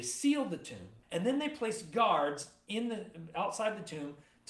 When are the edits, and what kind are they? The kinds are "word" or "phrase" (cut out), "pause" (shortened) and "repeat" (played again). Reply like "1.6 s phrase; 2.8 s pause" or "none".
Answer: 1.0 s pause